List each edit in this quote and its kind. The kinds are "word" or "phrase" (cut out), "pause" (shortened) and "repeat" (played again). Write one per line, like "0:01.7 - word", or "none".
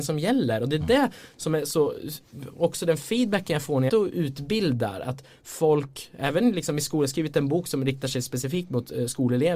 0:03.9 - phrase